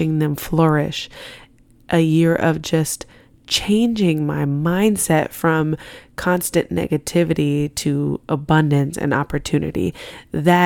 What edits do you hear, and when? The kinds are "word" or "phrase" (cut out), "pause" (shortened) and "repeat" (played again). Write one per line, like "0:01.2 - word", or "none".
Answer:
none

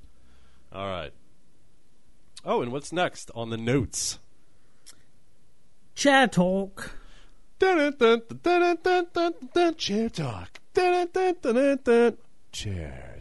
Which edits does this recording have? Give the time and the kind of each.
none

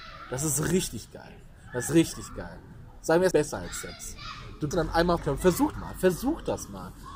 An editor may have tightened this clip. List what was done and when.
0:01.9 - word
0:03.3 - word
0:04.7 - word
0:05.2 - word
0:05.7 - word

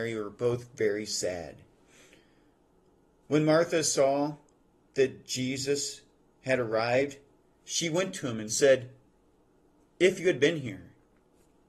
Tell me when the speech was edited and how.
none

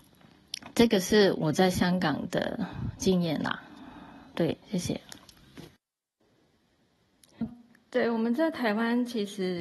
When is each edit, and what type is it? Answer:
0:04.6 - pause
0:07.4 - word

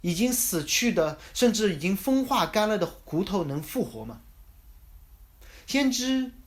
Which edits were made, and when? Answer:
0:04.8 - pause

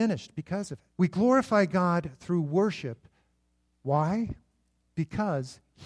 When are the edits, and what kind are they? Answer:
0:00.9 - pause

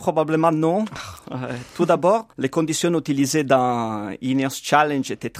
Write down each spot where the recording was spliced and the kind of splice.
0:02.3 - pause

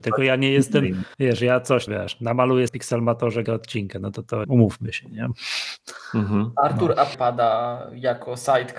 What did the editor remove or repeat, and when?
0:01.1 - pause
0:01.9 - word
0:02.7 - word
0:03.5 - word
0:04.4 - word
0:07.1 - word

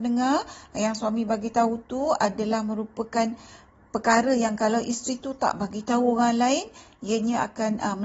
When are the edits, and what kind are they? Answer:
none

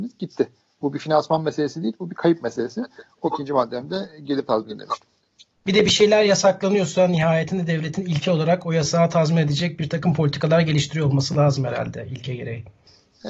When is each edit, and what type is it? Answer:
0:03.2 - word

